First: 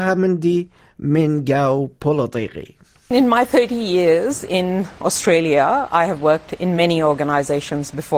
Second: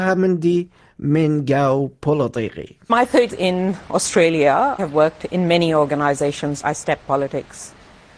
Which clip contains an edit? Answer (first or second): second